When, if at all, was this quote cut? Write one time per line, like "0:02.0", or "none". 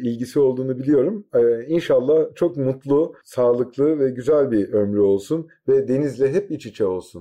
none